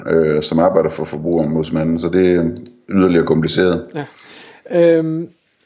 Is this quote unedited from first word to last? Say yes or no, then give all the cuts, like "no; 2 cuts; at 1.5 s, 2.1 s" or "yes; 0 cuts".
yes; 0 cuts